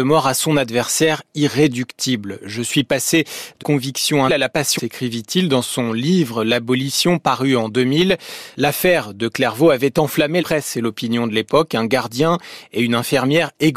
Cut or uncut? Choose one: cut